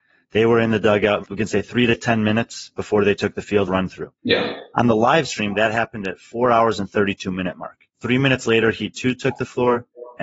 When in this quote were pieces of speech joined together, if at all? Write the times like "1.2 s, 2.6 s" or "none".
1.2 s, 3.7 s, 4.2 s, 7.9 s